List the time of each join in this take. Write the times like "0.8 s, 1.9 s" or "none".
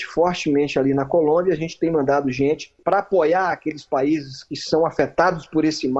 none